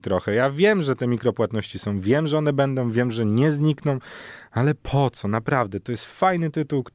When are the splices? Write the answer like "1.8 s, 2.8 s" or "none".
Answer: none